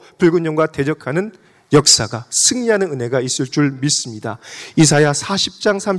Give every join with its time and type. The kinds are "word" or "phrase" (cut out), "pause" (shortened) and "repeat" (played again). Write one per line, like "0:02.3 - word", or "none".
none